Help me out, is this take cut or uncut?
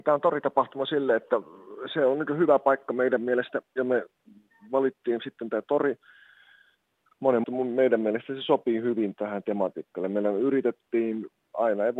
cut